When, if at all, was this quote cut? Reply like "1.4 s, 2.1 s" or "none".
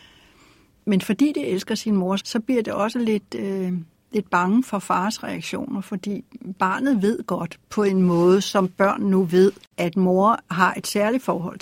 2.2 s